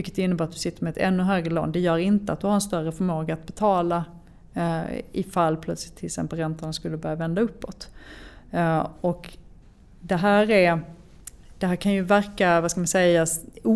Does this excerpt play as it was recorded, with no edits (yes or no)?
yes